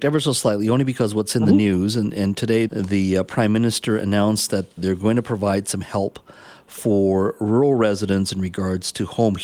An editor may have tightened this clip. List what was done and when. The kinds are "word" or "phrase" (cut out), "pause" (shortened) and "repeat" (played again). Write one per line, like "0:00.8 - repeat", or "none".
0:02.7 - word
0:04.8 - word